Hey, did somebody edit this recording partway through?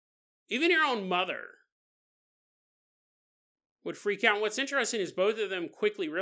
no; 0 cuts

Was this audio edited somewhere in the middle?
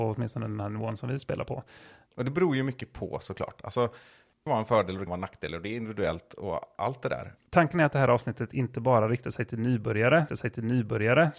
yes; 3 cuts; at 4.5 s, 5.1 s, 10.3 s

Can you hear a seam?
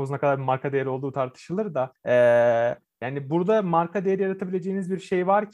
no; 0 cuts

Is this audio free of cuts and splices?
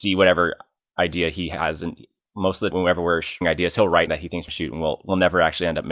no; 4 cuts; at 2.7 s, 3.4 s, 4.1 s, 4.5 s

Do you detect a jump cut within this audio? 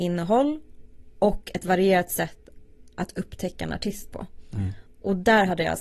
no; 0 cuts

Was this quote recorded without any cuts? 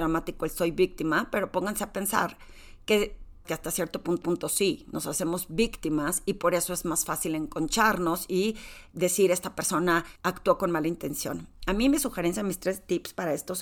no; 4 cuts; at 3.4 s, 4.2 s, 8.9 s, 10.2 s

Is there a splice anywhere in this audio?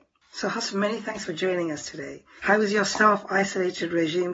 no; 0 cuts

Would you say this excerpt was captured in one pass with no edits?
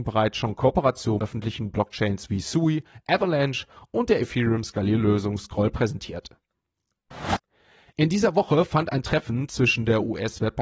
no; 1 cut; at 1.2 s

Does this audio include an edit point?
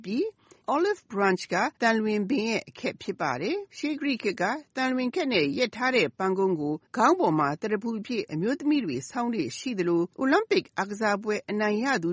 yes; 4 cuts; at 1.8 s, 3.7 s, 6.9 s, 10.1 s

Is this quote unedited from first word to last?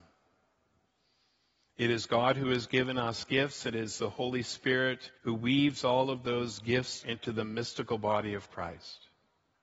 no; 2 cuts; at 5.2 s, 7.0 s

